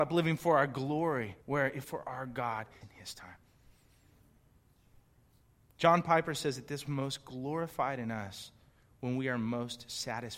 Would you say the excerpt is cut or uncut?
cut